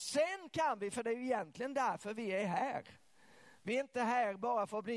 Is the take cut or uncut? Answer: uncut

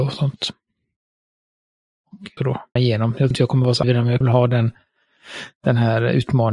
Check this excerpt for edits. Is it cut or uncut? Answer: cut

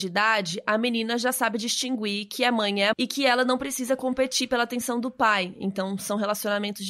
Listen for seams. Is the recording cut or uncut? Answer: cut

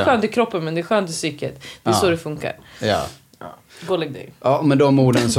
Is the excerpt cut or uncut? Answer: uncut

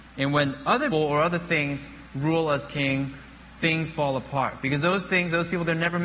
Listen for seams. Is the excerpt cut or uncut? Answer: cut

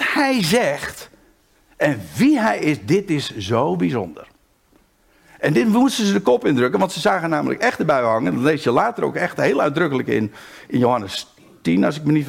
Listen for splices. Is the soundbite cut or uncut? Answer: uncut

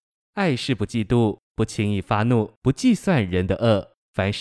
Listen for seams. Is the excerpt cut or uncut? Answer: cut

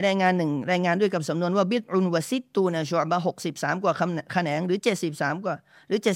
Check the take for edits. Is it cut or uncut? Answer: uncut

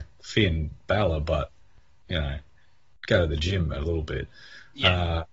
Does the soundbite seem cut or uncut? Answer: uncut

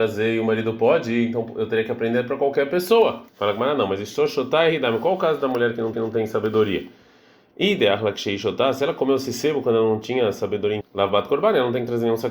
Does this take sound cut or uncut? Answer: cut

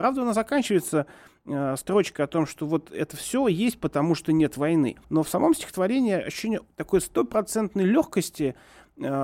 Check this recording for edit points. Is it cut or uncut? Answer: cut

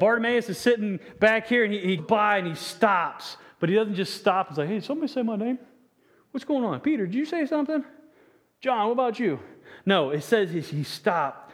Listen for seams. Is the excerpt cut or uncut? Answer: cut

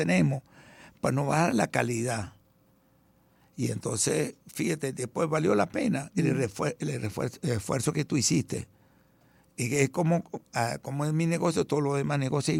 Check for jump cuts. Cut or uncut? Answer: uncut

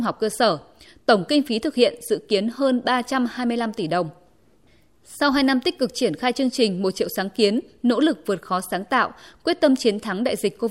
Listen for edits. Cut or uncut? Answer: uncut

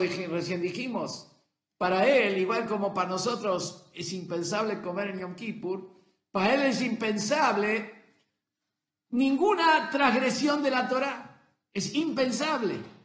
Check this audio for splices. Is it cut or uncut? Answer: uncut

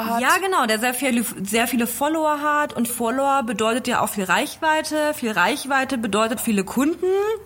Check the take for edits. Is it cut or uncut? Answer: cut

